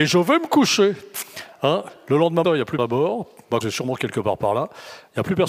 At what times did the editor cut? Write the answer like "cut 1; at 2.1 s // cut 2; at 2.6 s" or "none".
cut 1; at 2.4 s // cut 2; at 2.8 s // cut 3; at 3.6 s